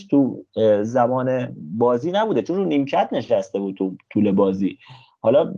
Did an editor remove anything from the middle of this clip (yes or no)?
no